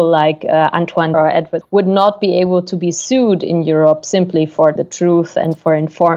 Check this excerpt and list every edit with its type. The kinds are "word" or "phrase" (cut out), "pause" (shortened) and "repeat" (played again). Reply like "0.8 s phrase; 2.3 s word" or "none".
1.1 s word; 1.6 s word; 4.8 s word